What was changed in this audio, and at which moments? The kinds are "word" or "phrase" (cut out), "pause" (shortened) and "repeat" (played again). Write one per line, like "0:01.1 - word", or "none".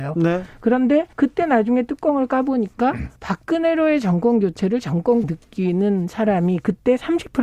0:01.1 - pause
0:03.2 - pause
0:05.2 - word